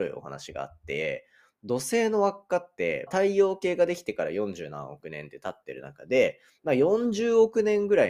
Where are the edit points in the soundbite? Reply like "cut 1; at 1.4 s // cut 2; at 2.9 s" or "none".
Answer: cut 1; at 3.1 s